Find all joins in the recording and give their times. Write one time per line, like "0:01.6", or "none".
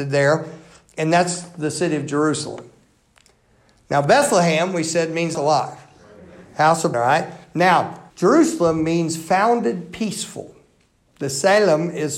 0:05.3
0:06.9
0:08.1